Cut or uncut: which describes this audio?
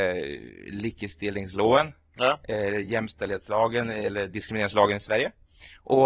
uncut